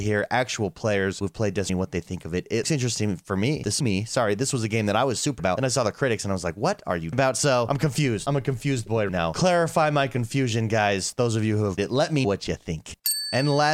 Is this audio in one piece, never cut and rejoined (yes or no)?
no